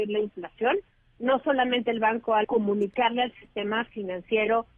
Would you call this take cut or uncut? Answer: cut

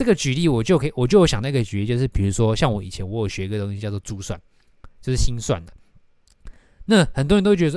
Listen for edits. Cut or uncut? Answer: uncut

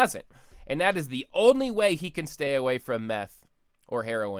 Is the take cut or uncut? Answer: uncut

